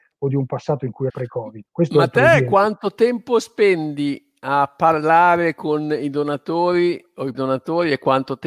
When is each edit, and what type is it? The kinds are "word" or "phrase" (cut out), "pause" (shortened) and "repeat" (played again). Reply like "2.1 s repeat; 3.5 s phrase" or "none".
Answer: 1.1 s word; 1.7 s pause; 7.3 s word